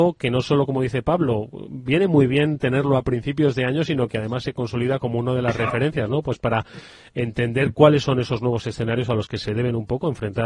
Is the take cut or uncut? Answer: uncut